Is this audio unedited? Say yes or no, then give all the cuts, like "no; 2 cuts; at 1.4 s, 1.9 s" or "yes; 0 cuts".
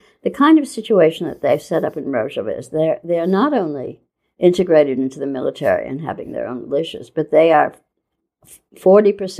yes; 0 cuts